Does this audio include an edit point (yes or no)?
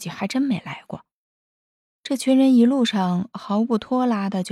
no